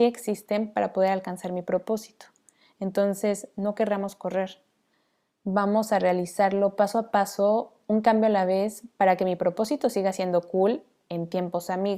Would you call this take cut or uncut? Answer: uncut